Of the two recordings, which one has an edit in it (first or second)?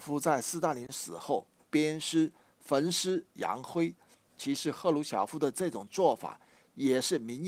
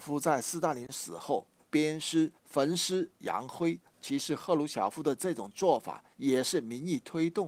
second